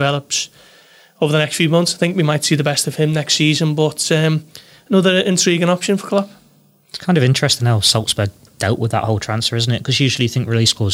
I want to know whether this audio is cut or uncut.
uncut